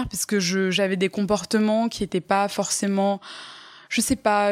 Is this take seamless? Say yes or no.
yes